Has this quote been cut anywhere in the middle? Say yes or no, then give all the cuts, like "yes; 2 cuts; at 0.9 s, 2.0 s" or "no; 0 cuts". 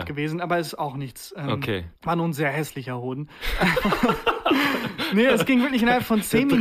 yes; 1 cut; at 2.0 s